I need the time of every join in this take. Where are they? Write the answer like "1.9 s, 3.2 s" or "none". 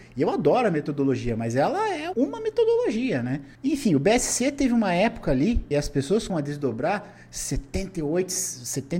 2.1 s, 3.5 s, 5.7 s, 6.3 s